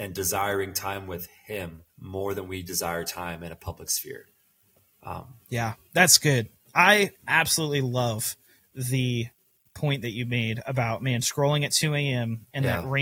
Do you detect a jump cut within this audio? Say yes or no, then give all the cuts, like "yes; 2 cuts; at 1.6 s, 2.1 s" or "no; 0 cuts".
yes; 2 cuts; at 1.9 s, 7.2 s